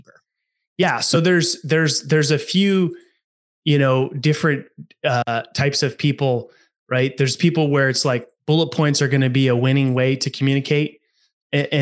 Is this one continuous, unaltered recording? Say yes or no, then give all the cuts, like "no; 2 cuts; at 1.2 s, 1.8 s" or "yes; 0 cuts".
yes; 0 cuts